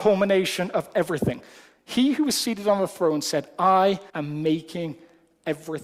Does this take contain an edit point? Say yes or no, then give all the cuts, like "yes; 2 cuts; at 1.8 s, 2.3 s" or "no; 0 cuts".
yes; 1 cut; at 4.1 s